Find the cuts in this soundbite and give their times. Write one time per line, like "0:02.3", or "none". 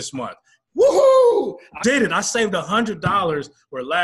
0:01.8